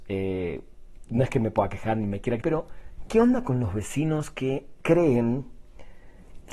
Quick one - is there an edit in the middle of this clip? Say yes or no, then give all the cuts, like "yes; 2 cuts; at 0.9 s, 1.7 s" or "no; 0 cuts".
yes; 1 cut; at 2.4 s